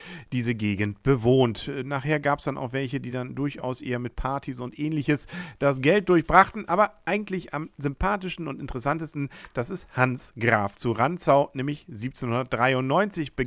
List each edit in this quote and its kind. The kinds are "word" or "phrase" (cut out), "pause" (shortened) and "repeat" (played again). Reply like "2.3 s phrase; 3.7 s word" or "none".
none